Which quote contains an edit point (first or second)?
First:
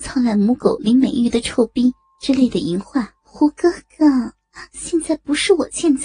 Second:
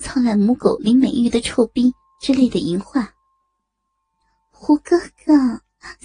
first